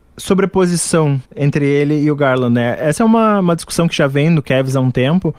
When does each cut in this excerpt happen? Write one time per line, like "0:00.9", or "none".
0:01.3